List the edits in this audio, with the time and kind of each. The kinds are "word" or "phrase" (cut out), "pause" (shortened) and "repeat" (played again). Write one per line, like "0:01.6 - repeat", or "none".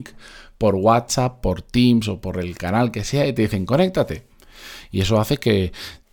none